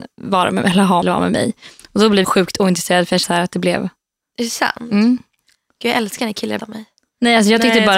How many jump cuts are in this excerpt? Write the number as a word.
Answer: four